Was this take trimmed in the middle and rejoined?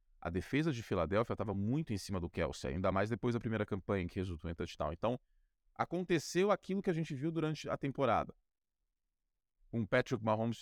no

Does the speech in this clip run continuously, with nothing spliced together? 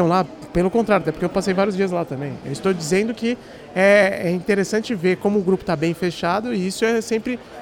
yes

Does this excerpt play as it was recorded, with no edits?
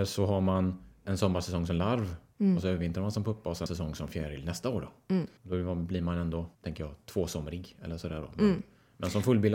no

